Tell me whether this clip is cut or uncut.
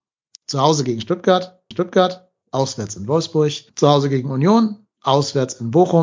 cut